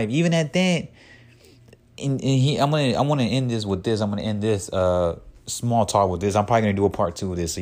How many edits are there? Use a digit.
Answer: 0